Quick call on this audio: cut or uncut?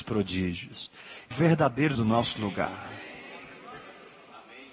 cut